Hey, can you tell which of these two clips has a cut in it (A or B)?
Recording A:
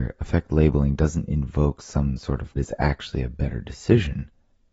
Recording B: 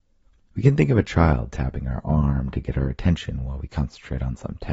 A